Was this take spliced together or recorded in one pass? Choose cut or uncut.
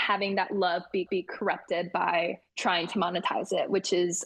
cut